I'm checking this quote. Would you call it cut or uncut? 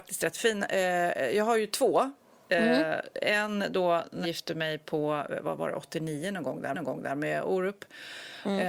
cut